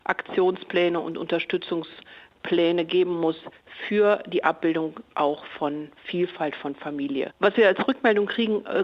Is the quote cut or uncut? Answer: uncut